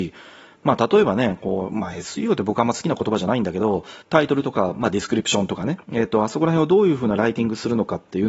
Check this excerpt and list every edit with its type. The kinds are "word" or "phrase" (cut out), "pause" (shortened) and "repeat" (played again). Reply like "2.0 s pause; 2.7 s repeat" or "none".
4.0 s pause; 5.8 s pause